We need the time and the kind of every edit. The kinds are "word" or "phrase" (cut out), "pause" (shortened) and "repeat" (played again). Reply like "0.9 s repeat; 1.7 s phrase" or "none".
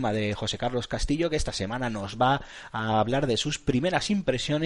none